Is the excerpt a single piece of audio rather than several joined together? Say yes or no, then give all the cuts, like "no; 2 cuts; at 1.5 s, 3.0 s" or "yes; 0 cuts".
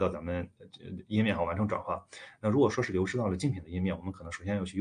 yes; 0 cuts